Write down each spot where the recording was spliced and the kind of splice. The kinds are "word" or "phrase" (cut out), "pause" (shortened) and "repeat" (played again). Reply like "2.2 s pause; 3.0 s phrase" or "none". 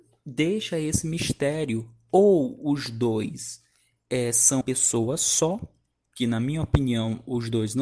4.6 s word